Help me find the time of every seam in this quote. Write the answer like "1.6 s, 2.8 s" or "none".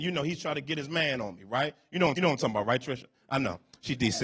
2.1 s